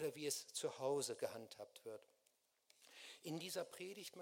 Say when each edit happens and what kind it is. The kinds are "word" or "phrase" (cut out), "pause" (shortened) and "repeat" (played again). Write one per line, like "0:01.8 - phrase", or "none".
none